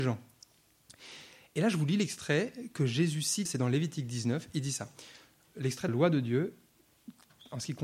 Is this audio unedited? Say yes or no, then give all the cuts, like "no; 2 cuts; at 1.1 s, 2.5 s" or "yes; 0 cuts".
no; 2 cuts; at 3.5 s, 5.9 s